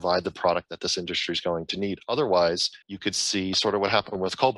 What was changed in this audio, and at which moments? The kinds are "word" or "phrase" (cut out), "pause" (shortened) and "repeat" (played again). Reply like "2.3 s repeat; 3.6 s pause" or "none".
2.8 s pause